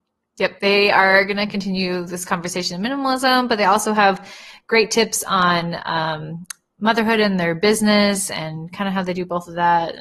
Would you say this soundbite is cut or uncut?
uncut